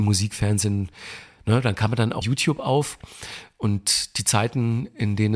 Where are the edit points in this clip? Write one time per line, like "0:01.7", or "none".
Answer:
0:02.2

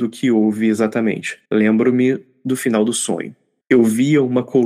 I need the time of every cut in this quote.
0:01.4
0:03.6

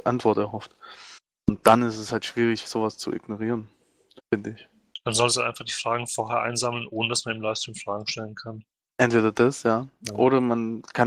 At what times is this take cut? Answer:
none

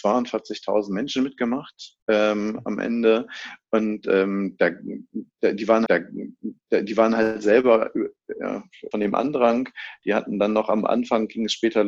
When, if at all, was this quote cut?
0:02.0
0:05.9
0:08.9

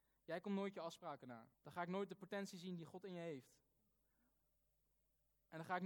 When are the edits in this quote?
0:01.5

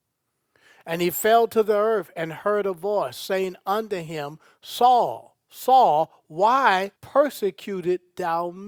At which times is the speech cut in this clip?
0:07.0

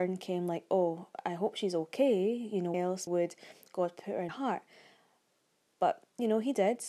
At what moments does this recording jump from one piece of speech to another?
0:02.7
0:03.1
0:04.3

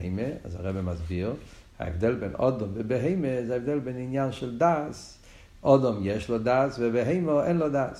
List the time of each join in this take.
none

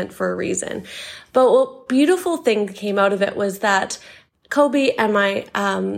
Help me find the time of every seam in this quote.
none

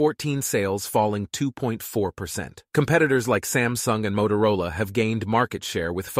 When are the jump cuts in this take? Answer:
0:02.7

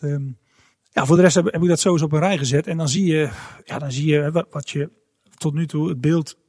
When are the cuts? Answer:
none

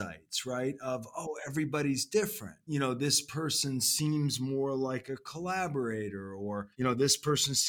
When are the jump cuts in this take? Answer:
none

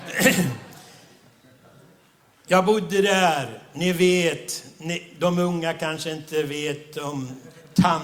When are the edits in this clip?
none

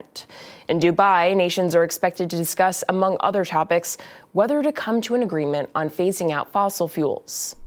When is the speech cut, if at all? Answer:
none

